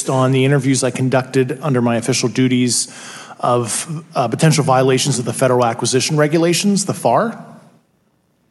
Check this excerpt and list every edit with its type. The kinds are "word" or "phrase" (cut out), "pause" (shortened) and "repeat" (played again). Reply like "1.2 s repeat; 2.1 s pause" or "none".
none